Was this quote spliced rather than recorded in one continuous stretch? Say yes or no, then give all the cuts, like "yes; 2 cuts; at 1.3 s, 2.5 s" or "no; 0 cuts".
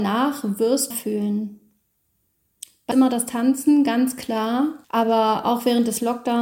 yes; 3 cuts; at 0.9 s, 2.9 s, 4.8 s